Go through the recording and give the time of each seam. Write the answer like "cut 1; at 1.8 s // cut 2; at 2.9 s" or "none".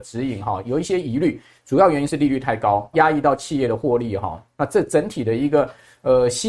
cut 1; at 2.9 s